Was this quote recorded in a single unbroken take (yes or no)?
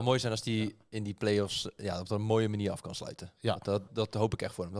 no